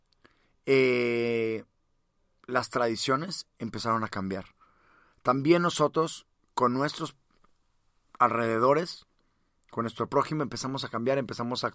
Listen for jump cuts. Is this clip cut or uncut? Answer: uncut